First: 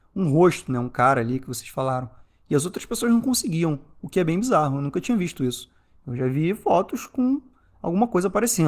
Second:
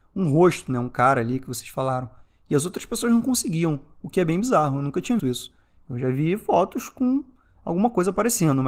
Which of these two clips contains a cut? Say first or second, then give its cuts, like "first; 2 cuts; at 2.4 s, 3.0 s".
second; 1 cut; at 5.2 s